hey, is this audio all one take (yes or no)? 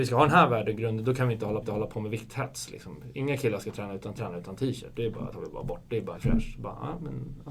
no